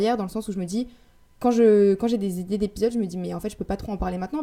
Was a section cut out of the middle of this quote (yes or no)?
no